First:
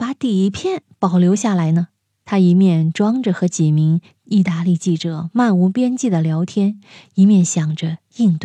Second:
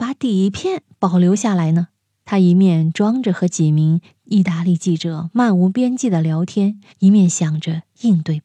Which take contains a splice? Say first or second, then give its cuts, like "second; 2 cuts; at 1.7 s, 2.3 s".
second; 1 cut; at 6.9 s